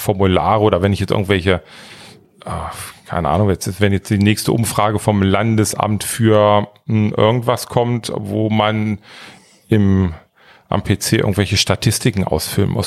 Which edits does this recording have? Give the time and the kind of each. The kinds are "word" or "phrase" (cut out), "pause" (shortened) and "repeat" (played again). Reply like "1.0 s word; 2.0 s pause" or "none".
none